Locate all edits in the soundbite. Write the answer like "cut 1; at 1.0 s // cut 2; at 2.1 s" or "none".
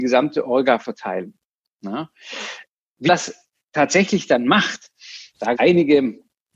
cut 1; at 3.1 s // cut 2; at 5.6 s